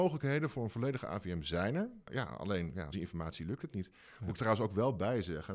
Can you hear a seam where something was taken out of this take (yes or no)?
yes